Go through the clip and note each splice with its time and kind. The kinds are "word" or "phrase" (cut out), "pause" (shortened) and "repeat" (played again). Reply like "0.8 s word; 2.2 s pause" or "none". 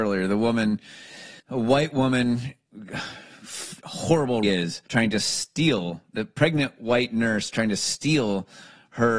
1.4 s pause; 3.8 s word; 4.4 s phrase; 4.9 s pause